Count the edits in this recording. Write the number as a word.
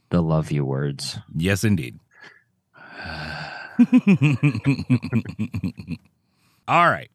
one